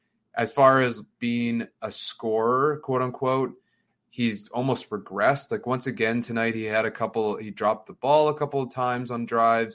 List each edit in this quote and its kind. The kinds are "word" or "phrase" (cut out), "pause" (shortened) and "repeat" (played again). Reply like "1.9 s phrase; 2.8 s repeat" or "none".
none